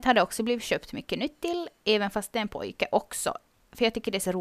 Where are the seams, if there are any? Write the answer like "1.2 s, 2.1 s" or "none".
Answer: none